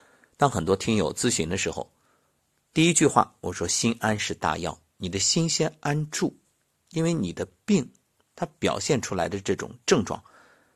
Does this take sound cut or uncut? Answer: uncut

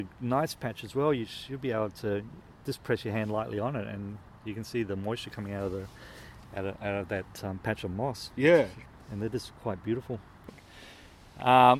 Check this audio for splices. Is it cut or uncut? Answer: uncut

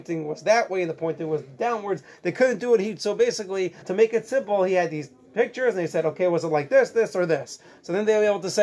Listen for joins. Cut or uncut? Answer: cut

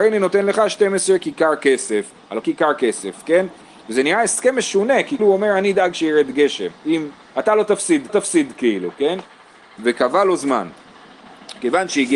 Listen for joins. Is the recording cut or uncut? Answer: cut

